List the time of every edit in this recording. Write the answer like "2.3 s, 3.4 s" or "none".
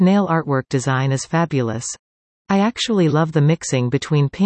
none